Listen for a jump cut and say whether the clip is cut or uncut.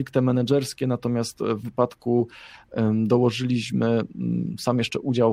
cut